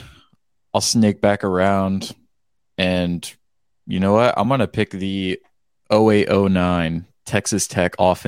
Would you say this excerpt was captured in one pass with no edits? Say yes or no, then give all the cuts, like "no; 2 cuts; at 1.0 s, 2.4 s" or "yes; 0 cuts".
yes; 0 cuts